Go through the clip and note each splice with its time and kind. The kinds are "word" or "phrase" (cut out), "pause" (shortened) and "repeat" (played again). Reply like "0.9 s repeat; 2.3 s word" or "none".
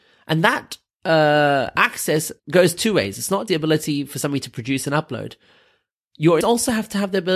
2.4 s pause; 3.5 s word; 6.4 s word